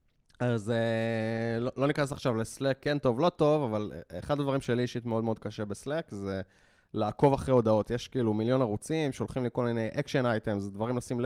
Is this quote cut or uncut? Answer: uncut